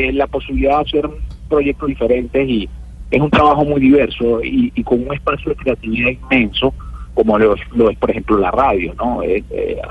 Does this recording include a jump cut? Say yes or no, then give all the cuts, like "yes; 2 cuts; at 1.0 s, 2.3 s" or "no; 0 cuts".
no; 0 cuts